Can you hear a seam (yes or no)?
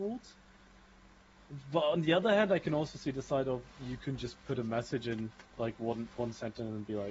yes